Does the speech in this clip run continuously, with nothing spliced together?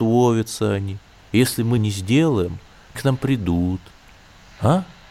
no; 2 cuts; at 1.8 s, 3.0 s

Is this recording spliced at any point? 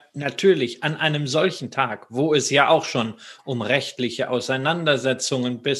no; 0 cuts

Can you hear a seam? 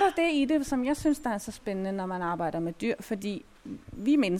no; 0 cuts

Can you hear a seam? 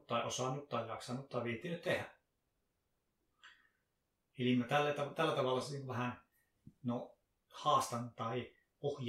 no; 0 cuts

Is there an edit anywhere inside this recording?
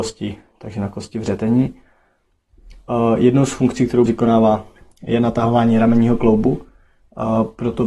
yes; 1 cut; at 4.1 s

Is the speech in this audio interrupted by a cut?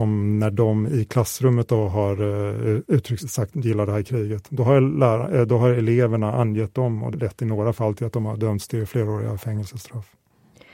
yes; 3 cuts; at 3.2 s, 3.5 s, 7.1 s

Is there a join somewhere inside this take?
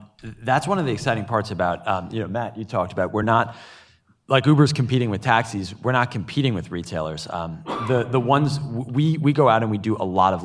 no; 0 cuts

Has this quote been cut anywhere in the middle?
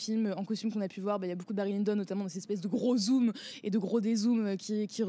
no; 0 cuts

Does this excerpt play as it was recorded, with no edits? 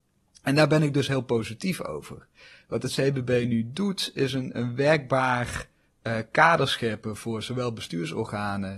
yes; 0 cuts

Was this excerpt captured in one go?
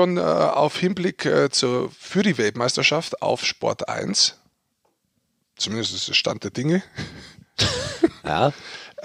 yes; 0 cuts

